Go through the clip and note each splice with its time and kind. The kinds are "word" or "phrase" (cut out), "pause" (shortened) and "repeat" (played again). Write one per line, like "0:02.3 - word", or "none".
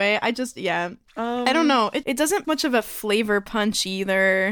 0:01.1 - pause
0:02.0 - word
0:02.4 - word